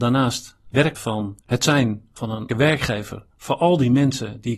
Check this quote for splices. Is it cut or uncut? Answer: cut